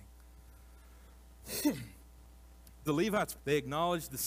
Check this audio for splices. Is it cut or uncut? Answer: cut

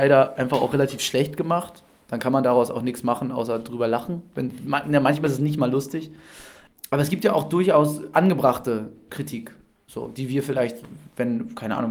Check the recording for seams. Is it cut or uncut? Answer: uncut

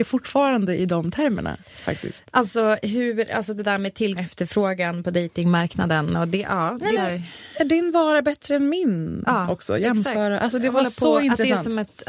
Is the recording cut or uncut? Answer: cut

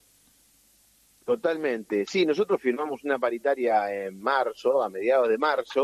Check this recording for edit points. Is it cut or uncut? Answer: uncut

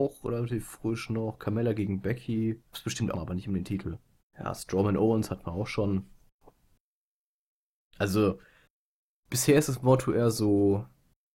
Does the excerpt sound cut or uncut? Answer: cut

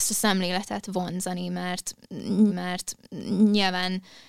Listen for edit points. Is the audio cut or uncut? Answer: cut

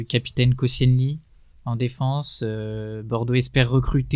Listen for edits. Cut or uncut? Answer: uncut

